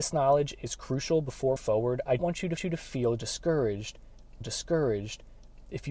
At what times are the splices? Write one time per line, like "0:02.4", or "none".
0:01.6
0:02.2
0:02.6
0:04.4